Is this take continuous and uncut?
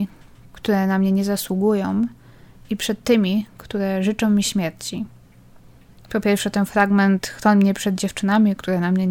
yes; 0 cuts

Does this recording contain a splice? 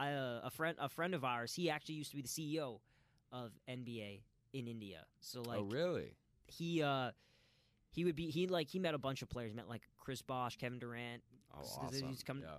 no; 0 cuts

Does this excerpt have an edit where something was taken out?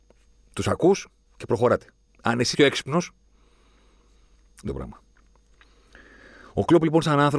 yes; 4 cuts; at 1.2 s, 2.1 s, 2.5 s, 4.7 s

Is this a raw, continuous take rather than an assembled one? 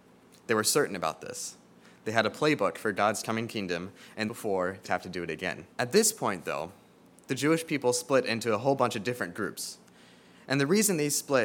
no; 3 cuts; at 4.3 s, 4.8 s, 5.7 s

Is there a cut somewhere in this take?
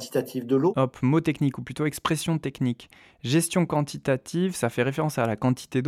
no; 0 cuts

